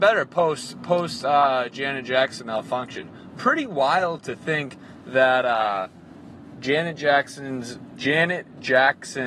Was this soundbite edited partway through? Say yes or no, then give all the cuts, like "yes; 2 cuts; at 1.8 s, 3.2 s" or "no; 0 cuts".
no; 0 cuts